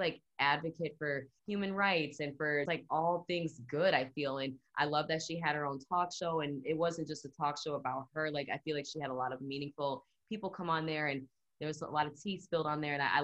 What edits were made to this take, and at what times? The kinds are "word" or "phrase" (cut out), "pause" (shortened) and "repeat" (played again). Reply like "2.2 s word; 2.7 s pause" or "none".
1.4 s word; 2.7 s word